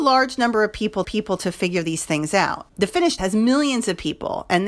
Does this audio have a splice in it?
yes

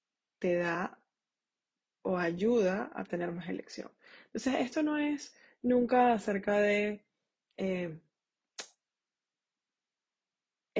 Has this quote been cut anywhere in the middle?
no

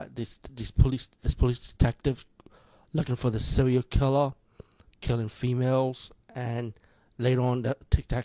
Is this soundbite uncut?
yes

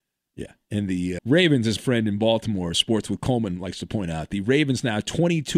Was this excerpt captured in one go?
no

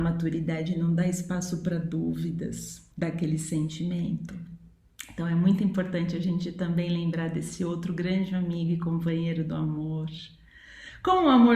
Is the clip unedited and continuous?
no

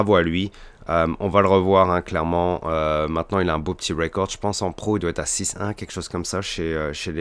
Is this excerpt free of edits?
yes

